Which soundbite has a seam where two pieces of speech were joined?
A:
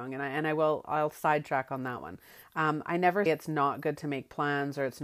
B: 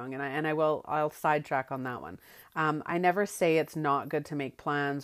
A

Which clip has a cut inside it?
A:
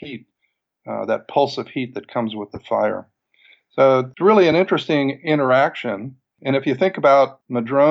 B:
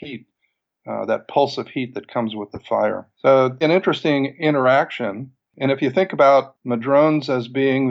B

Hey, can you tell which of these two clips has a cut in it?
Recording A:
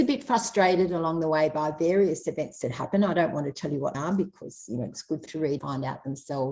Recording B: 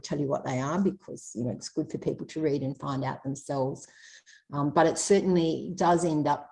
A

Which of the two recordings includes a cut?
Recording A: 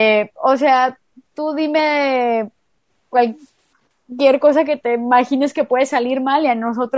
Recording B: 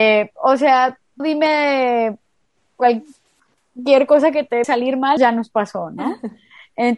B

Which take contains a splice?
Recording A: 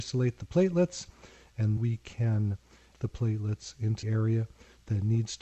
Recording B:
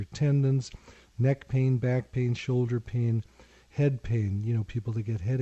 A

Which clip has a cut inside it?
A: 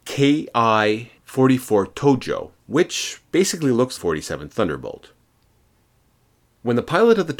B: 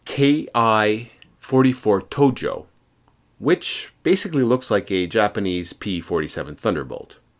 A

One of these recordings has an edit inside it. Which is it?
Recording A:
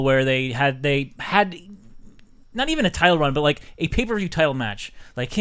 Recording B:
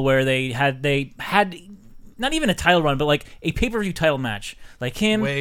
B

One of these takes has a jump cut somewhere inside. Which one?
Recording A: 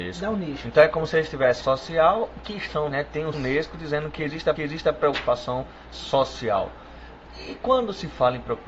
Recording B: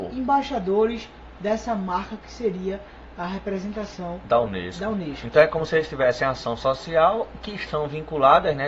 A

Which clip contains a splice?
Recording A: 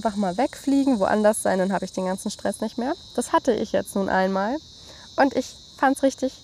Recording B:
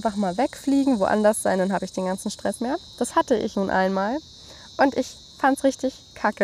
B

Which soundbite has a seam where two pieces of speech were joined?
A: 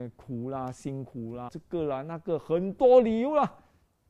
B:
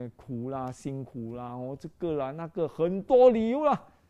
A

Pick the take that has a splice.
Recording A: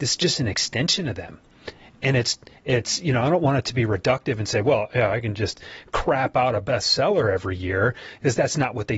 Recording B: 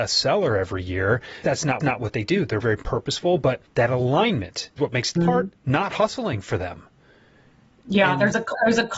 B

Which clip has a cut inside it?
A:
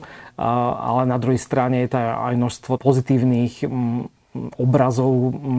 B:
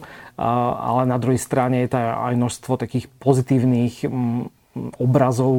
A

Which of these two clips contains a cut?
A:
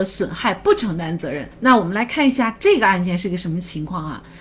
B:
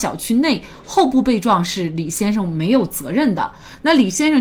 A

